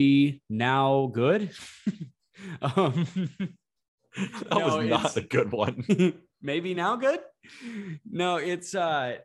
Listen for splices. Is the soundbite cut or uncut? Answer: uncut